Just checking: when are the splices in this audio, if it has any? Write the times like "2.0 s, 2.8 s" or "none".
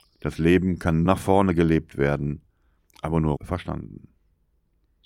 1.1 s, 3.4 s